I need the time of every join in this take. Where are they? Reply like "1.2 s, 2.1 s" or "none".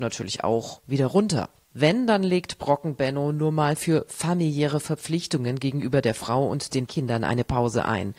6.9 s